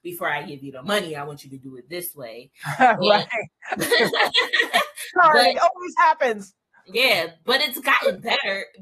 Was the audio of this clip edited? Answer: no; 0 cuts

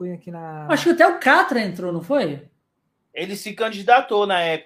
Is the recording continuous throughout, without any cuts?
yes; 0 cuts

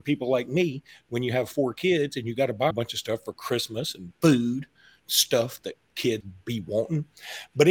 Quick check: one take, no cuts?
no; 2 cuts; at 2.7 s, 6.2 s

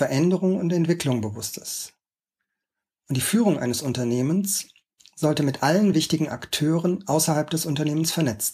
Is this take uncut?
yes; 0 cuts

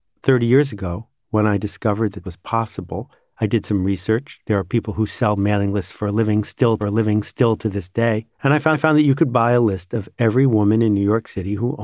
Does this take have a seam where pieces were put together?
yes; 4 cuts; at 2.2 s, 6.8 s, 8.3 s, 8.7 s

